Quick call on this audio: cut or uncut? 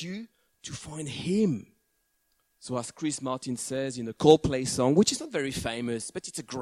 cut